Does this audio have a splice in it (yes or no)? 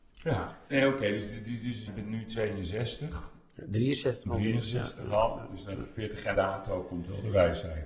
yes